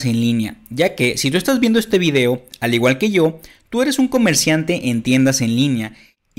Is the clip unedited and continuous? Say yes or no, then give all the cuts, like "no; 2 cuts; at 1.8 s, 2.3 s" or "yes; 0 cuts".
yes; 0 cuts